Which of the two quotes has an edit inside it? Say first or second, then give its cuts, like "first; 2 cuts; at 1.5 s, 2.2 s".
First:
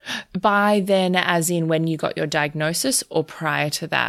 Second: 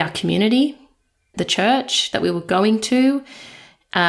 second; 1 cut; at 1.3 s